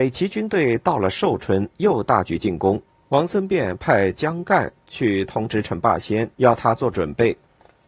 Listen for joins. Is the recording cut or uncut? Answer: cut